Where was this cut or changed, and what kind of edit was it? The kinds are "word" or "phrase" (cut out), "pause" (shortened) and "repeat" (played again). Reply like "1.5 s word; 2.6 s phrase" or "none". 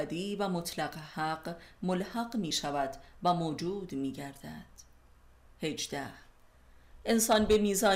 none